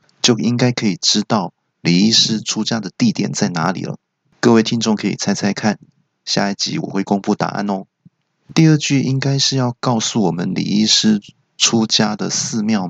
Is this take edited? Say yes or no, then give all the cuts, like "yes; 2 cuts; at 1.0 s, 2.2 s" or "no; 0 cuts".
no; 0 cuts